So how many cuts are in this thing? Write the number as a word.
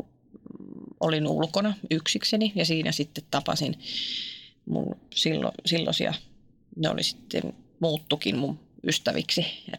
zero